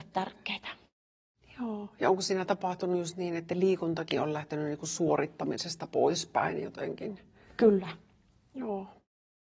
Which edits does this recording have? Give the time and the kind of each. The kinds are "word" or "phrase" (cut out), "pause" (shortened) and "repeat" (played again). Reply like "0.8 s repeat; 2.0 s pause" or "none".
none